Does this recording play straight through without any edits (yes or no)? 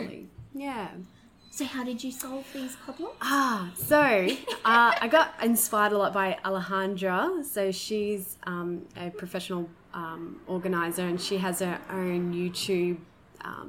yes